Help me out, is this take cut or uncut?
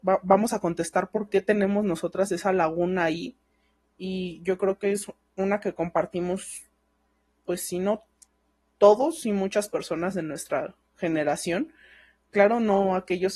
uncut